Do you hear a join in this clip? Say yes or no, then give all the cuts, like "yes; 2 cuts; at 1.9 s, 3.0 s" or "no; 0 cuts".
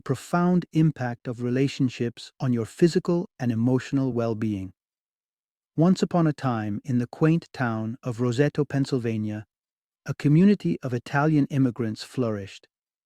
no; 0 cuts